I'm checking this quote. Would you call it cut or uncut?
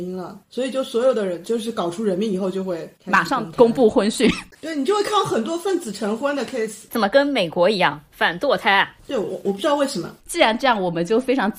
uncut